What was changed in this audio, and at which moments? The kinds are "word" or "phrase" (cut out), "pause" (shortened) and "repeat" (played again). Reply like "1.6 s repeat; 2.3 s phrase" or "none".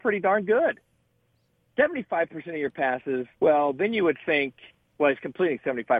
3.3 s pause